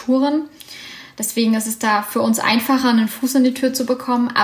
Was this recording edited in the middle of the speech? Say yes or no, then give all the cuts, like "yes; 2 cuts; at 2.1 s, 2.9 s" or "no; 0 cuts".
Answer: no; 0 cuts